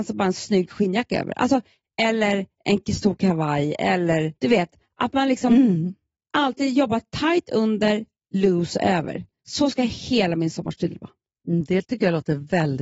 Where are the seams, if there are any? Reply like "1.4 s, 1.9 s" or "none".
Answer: 4.4 s